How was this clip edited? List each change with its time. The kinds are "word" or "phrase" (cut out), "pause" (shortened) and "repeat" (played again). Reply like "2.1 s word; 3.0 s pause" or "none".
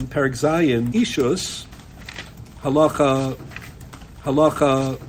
0.9 s word; 4.2 s repeat